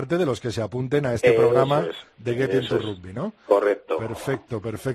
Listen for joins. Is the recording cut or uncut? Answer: uncut